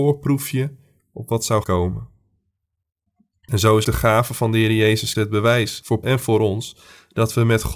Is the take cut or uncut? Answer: cut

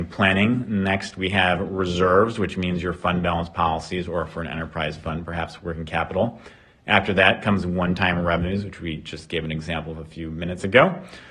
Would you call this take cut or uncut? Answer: uncut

